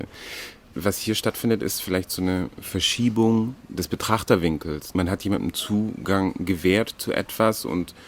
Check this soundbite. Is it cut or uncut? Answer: uncut